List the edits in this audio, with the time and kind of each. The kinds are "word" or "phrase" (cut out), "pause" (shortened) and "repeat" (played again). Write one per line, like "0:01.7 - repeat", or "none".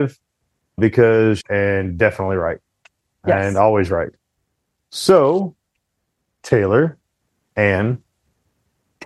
0:01.4 - phrase